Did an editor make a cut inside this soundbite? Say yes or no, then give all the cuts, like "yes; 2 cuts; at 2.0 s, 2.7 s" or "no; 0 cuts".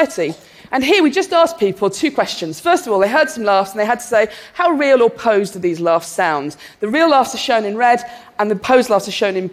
no; 0 cuts